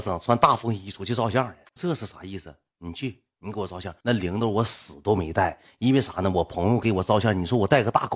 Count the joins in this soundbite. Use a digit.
1